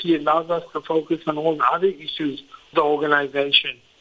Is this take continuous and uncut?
no; 1 cut; at 2.7 s

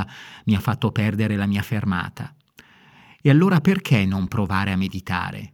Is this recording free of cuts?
yes; 0 cuts

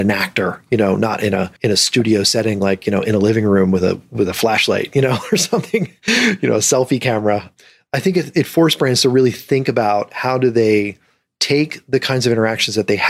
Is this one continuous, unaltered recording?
no; 1 cut; at 1.6 s

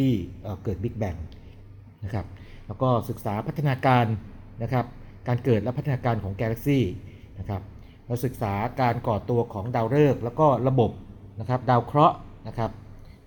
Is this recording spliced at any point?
yes; 1 cut; at 1.9 s

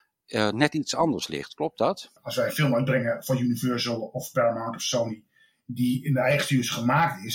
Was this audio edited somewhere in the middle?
no; 0 cuts

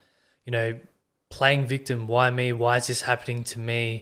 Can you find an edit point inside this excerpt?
no; 0 cuts

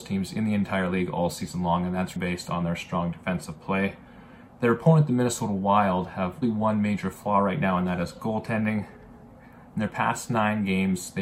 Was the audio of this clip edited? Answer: yes; 2 cuts; at 2.2 s, 6.4 s

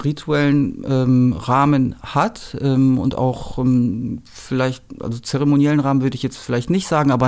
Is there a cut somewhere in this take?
no; 0 cuts

